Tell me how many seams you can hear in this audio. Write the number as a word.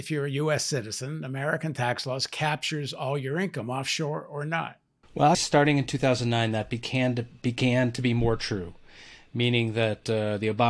one